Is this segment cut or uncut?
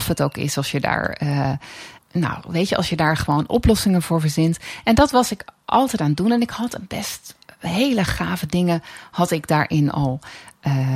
cut